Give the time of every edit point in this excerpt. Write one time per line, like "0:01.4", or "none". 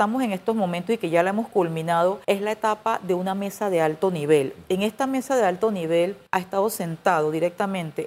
0:02.2
0:06.3